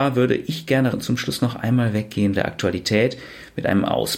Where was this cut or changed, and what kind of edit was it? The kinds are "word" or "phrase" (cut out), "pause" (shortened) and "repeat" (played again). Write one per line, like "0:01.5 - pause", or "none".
0:00.9 - word
0:02.3 - word